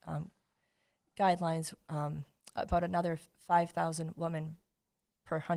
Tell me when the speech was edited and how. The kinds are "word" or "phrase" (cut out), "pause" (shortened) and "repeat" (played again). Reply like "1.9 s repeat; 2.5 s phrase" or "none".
none